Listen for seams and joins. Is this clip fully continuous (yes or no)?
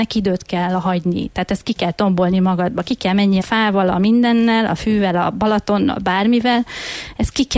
no